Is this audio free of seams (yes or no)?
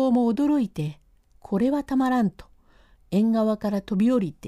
yes